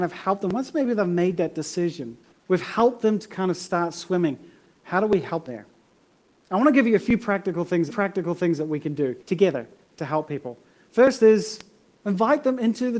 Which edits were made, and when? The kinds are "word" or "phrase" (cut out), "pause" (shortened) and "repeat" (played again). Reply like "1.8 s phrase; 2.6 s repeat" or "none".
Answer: 2.3 s pause; 5.5 s phrase; 7.9 s repeat; 9.2 s pause